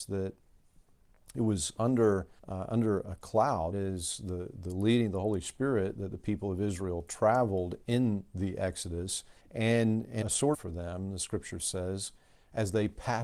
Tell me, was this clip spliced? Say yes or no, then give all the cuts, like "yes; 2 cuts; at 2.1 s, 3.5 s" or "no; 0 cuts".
yes; 5 cuts; at 2.4 s, 3.7 s, 9.4 s, 10.2 s, 10.5 s